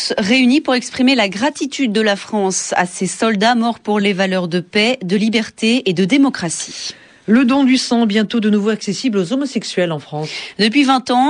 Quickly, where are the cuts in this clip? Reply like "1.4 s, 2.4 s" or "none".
none